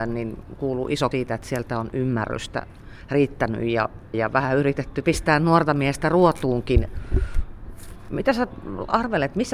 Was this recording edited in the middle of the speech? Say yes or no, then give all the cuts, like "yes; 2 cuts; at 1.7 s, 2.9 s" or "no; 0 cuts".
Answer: yes; 3 cuts; at 1.1 s, 4.1 s, 5.0 s